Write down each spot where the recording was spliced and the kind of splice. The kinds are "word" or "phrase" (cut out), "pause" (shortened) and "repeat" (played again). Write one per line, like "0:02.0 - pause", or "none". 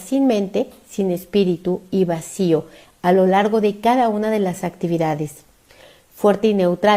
none